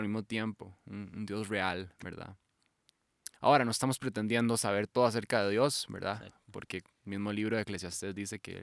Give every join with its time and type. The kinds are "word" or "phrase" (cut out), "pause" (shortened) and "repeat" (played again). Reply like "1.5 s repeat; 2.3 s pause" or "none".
3.3 s pause; 6.9 s pause